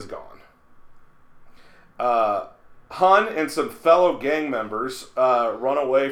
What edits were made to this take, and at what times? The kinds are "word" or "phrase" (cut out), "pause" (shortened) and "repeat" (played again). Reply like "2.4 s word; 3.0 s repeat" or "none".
2.8 s pause